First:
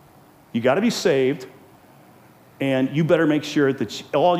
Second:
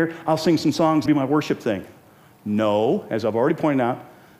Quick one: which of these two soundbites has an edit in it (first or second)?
second